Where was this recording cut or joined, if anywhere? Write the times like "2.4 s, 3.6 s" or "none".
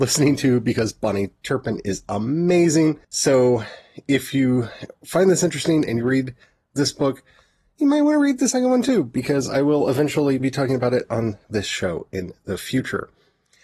3.0 s, 10.4 s, 11.4 s